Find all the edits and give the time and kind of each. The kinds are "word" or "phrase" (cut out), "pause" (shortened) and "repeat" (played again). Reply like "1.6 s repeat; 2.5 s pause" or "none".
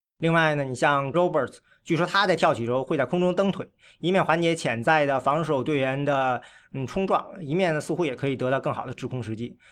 1.1 s word